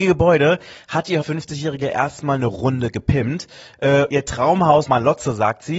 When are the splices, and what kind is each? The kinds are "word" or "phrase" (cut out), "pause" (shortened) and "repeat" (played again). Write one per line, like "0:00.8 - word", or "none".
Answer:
0:01.2 - word
0:04.1 - word
0:04.8 - word